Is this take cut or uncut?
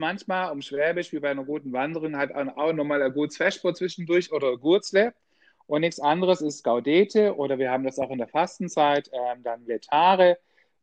uncut